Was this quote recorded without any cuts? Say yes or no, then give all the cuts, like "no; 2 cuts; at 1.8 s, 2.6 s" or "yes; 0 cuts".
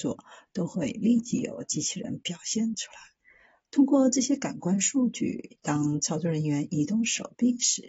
yes; 0 cuts